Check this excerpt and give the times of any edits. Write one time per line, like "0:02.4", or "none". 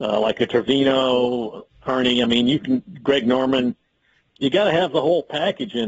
none